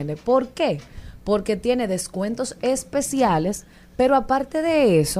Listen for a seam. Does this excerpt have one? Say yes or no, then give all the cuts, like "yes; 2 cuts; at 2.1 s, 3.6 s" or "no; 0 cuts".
no; 0 cuts